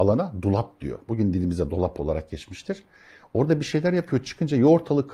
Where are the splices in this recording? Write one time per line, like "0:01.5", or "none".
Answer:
none